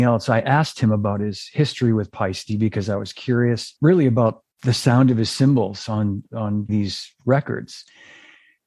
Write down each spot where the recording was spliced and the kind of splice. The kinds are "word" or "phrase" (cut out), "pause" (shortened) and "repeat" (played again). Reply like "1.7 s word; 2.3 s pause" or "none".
3.8 s pause; 4.5 s pause; 6.7 s phrase